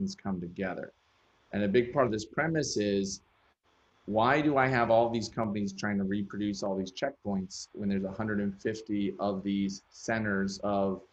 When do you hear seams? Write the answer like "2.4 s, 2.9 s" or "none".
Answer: none

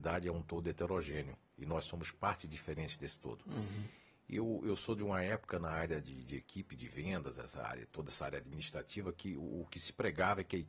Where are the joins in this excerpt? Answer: none

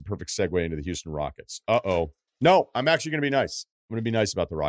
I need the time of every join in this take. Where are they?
2.3 s

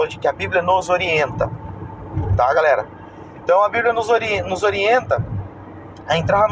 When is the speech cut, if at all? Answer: none

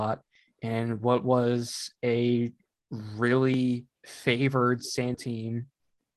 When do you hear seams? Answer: 4.0 s, 5.1 s

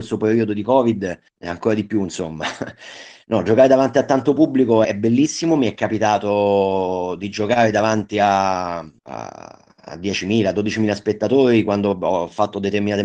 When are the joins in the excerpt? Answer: 1.3 s, 4.8 s, 9.0 s

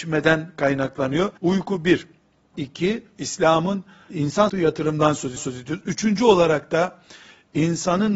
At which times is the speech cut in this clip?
1.4 s, 2.5 s, 4.1 s, 4.5 s, 5.4 s

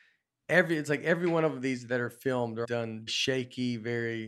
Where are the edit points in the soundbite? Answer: 2.6 s, 3.1 s

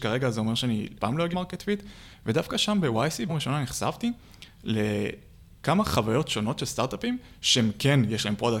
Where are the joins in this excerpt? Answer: 1.0 s, 1.3 s, 3.3 s

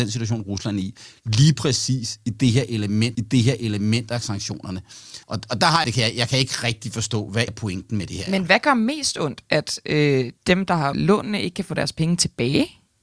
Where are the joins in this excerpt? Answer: 3.1 s, 5.2 s, 5.8 s, 7.5 s, 10.4 s, 10.9 s

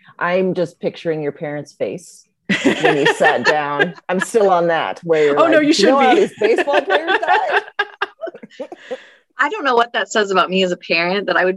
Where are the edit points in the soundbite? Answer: none

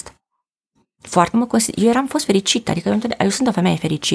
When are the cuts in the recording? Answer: 1.3 s

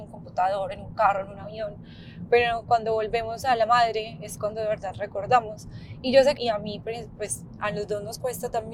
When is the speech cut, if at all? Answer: 6.4 s

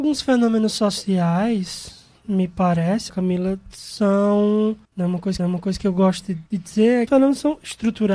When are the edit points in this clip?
3.1 s, 4.8 s, 5.4 s, 6.5 s, 7.1 s

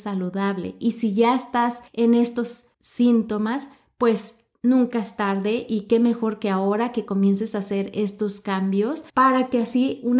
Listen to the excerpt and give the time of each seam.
1.9 s, 2.7 s, 4.5 s, 9.1 s

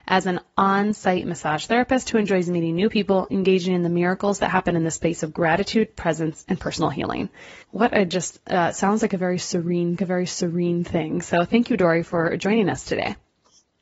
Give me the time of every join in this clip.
7.6 s, 10.0 s

